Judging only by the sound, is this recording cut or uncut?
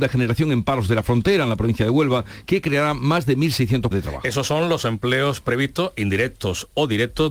cut